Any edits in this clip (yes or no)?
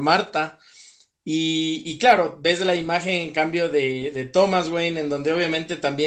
no